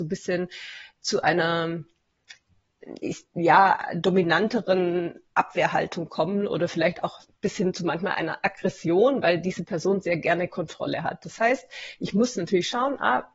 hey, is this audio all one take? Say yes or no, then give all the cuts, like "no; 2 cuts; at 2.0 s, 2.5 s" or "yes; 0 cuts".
yes; 0 cuts